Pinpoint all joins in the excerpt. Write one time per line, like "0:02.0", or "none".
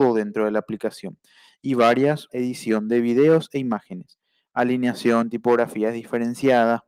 0:02.3